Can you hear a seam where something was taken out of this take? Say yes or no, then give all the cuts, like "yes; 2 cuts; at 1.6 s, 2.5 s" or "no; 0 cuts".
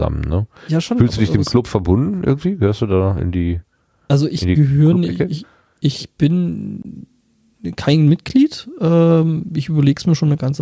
no; 0 cuts